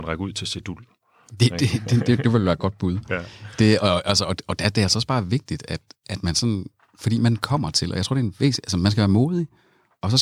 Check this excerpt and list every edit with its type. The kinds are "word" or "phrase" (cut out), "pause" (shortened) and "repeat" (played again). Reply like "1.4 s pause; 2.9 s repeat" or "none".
none